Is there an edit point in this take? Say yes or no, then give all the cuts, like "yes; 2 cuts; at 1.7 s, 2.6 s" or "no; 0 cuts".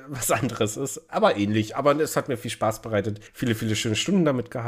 yes; 1 cut; at 3.3 s